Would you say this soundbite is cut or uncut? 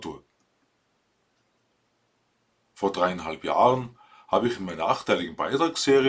uncut